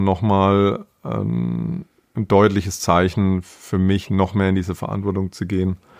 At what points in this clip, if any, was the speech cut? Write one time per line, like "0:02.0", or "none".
none